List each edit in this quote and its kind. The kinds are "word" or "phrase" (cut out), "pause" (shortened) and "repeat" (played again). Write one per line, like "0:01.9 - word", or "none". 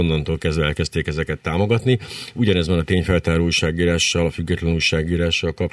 none